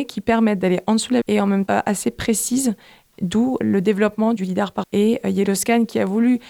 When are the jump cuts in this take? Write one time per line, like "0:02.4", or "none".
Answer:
0:01.2
0:01.7
0:03.6
0:04.4
0:04.8